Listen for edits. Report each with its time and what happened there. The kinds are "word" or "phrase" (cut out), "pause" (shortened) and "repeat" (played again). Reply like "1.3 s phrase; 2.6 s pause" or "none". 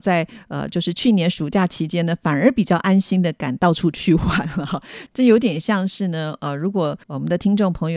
7.0 s pause